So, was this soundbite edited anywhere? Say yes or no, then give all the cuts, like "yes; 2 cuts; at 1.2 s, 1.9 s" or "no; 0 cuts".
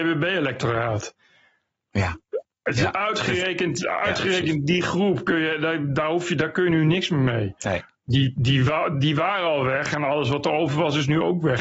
no; 0 cuts